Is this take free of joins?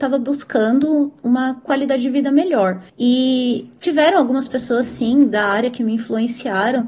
no; 1 cut; at 2.9 s

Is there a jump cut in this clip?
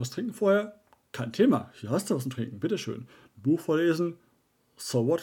no; 0 cuts

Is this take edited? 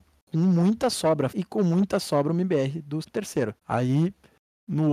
yes; 3 cuts; at 1.3 s, 3.0 s, 3.6 s

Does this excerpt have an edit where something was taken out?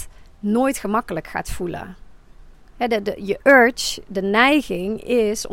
no; 0 cuts

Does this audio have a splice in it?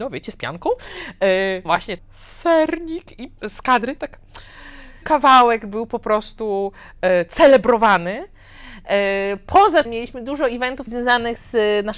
yes; 7 cuts; at 1.6 s, 2.0 s, 3.4 s, 4.0 s, 5.0 s, 9.8 s, 10.9 s

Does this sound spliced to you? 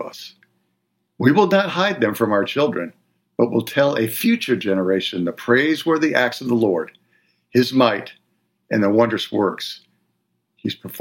no; 0 cuts

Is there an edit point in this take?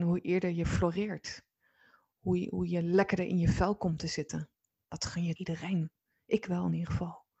yes; 1 cut; at 5.4 s

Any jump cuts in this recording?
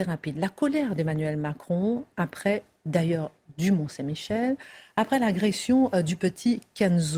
no; 0 cuts

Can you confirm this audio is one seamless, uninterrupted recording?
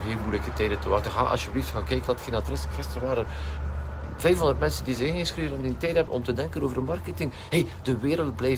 no; 2 cuts; at 2.1 s, 6.1 s

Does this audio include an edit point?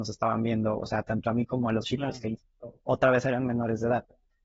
yes; 1 cut; at 1.8 s

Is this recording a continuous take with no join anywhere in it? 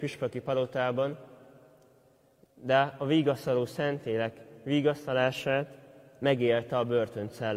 yes; 0 cuts

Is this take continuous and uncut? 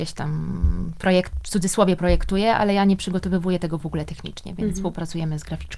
yes; 0 cuts

